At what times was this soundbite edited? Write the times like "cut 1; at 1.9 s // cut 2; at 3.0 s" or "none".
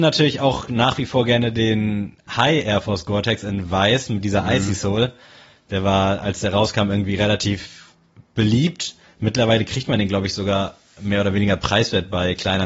none